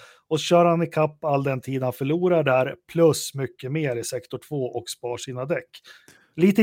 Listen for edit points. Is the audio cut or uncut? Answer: uncut